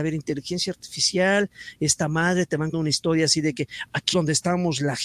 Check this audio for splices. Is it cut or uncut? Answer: cut